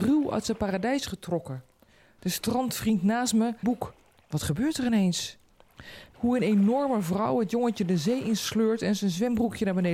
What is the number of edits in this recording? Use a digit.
2